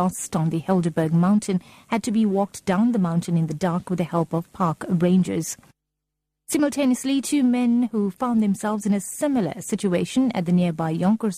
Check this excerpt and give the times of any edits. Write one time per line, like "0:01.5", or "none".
none